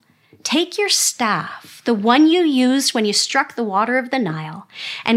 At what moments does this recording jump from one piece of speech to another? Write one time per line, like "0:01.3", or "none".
none